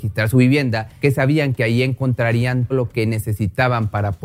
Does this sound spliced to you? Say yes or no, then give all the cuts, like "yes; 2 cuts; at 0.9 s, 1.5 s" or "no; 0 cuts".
yes; 2 cuts; at 1.0 s, 2.7 s